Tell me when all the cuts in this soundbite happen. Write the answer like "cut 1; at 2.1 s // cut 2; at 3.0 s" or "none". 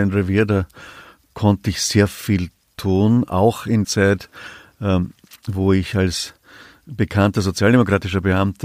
cut 1; at 3.8 s